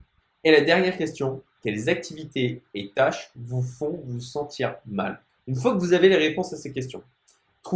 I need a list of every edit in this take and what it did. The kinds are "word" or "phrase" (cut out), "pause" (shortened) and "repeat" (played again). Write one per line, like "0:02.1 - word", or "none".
0:05.3 - pause

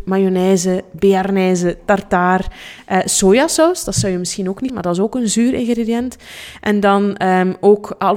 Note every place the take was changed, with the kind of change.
0:04.7 - word

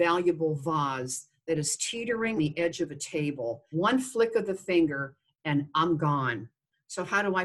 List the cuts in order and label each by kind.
0:02.4 - word
0:03.7 - word

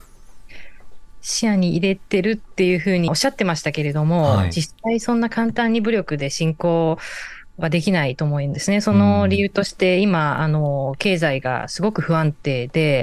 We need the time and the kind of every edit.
0:03.1 - phrase

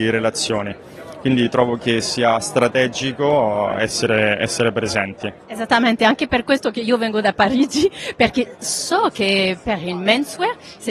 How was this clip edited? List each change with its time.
0:05.4 - pause

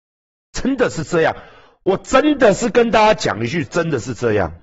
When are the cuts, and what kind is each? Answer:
none

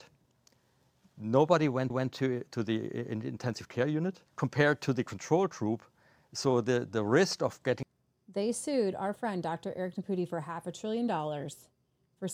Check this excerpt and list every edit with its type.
0:01.9 - repeat
0:04.3 - pause

